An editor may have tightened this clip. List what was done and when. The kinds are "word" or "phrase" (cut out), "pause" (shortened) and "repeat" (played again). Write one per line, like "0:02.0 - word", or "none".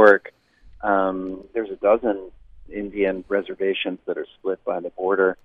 none